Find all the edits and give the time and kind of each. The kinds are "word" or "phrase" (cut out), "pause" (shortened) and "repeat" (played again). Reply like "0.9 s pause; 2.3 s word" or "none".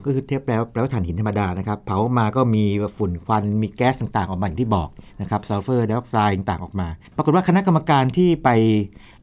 7.0 s pause